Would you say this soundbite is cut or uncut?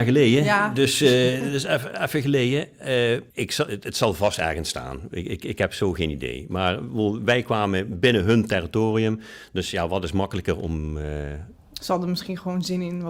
cut